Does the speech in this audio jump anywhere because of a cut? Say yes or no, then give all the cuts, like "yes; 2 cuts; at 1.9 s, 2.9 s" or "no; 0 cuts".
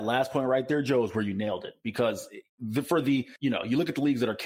yes; 2 cuts; at 2.5 s, 3.4 s